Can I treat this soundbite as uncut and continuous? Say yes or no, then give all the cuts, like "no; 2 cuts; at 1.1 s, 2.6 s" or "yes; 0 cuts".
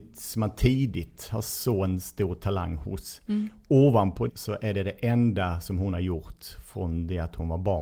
no; 1 cut; at 4.3 s